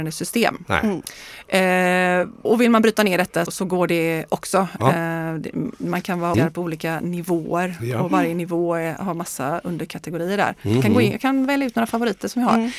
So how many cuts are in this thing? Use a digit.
3